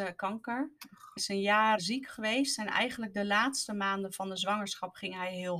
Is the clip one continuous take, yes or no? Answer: no